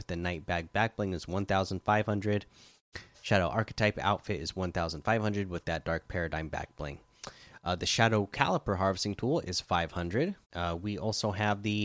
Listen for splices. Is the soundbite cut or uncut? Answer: cut